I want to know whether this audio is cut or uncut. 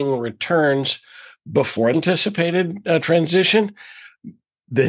cut